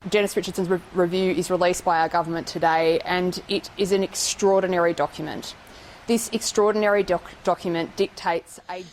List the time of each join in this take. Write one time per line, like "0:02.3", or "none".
none